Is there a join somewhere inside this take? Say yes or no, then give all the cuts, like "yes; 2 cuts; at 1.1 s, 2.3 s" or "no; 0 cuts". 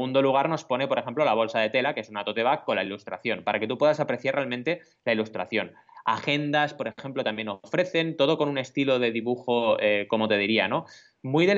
no; 0 cuts